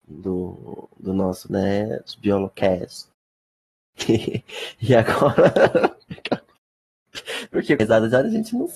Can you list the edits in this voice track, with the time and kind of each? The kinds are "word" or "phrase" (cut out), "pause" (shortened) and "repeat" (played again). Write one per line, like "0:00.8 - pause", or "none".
0:01.5 - word
0:07.8 - phrase